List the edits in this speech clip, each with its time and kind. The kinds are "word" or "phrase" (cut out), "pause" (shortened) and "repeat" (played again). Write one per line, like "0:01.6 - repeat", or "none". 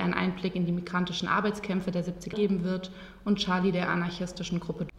0:02.3 - word